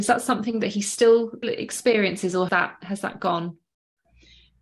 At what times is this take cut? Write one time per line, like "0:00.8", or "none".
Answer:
0:01.4
0:02.5